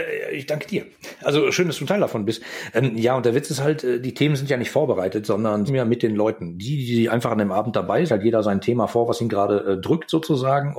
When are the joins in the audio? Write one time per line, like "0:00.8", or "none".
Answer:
0:05.7
0:08.1